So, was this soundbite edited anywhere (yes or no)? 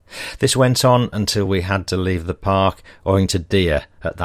no